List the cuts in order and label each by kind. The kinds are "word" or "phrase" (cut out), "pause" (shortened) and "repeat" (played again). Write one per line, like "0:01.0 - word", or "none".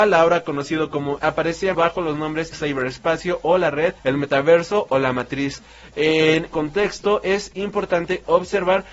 0:01.2 - word
0:01.7 - word
0:02.5 - word
0:04.0 - pause
0:06.5 - word